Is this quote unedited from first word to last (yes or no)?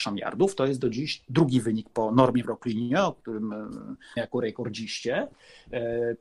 no